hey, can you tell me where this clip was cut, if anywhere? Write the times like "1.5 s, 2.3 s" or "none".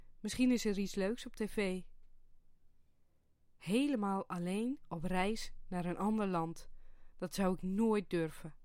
none